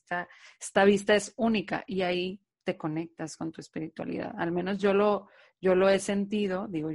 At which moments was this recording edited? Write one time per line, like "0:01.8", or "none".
0:02.5